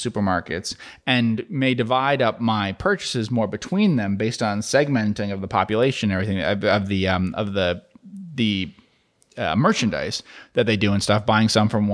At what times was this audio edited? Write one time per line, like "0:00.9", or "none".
none